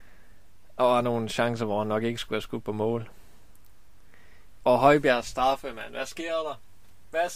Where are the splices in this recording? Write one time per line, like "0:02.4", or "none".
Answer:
none